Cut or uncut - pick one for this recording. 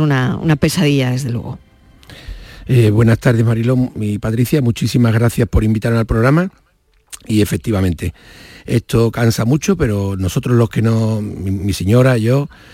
uncut